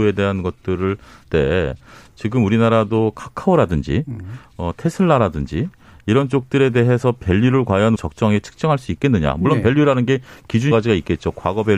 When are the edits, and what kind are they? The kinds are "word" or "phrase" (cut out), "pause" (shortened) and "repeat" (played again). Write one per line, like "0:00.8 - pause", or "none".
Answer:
0:01.2 - word
0:07.9 - word
0:10.7 - word